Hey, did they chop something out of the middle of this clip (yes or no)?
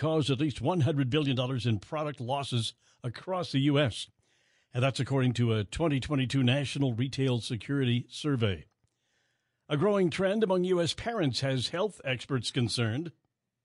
no